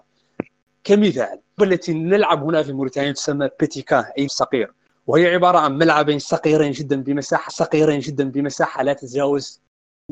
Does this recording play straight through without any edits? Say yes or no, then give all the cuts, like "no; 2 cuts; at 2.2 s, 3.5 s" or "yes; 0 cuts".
no; 3 cuts; at 1.6 s, 4.3 s, 7.5 s